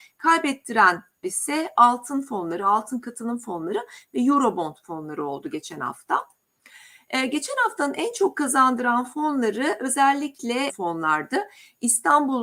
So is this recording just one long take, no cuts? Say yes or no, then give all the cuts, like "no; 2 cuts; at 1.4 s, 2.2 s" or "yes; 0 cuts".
no; 2 cuts; at 1.2 s, 10.7 s